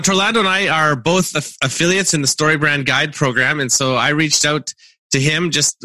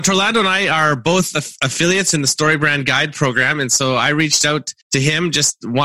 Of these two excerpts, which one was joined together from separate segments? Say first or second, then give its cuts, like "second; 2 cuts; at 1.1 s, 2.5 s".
second; 1 cut; at 4.8 s